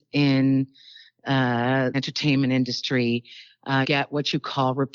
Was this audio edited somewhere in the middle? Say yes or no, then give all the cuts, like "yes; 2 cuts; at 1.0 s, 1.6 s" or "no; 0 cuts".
yes; 2 cuts; at 1.9 s, 3.8 s